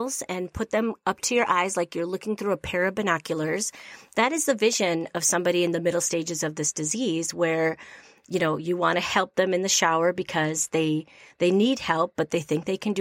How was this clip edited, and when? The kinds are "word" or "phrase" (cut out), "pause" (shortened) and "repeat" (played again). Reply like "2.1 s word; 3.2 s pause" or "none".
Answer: none